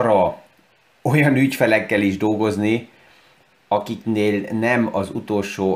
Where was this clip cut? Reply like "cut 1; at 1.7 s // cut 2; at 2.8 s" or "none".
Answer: none